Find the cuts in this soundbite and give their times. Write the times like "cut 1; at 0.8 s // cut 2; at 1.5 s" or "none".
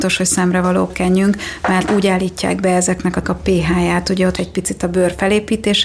cut 1; at 0.9 s // cut 2; at 1.9 s // cut 3; at 3.2 s // cut 4; at 4.4 s